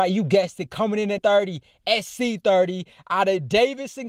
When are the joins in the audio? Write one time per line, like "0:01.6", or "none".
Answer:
0:01.2